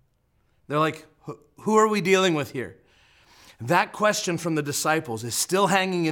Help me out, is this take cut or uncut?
uncut